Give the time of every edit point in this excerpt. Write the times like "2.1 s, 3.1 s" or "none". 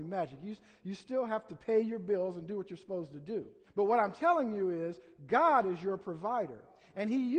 3.6 s